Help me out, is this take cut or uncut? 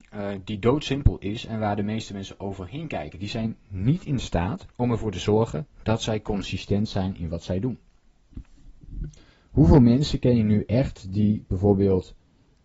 cut